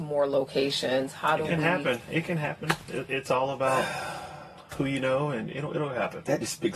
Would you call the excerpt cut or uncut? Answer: uncut